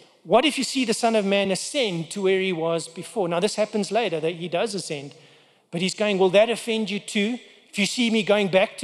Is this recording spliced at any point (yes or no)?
no